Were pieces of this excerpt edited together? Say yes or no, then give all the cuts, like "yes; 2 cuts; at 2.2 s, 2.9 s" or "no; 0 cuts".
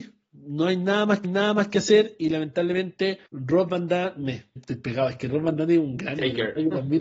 yes; 3 cuts; at 1.2 s, 3.3 s, 4.6 s